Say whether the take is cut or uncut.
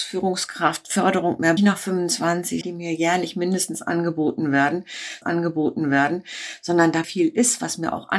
cut